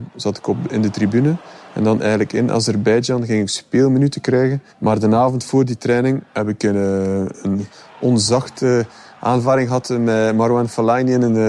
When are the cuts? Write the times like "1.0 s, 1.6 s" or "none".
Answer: 4.7 s